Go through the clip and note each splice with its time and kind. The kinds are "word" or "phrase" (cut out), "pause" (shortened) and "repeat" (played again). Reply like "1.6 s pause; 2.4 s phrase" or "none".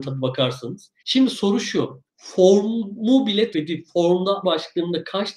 1.0 s pause; 2.1 s pause; 3.5 s word; 4.4 s phrase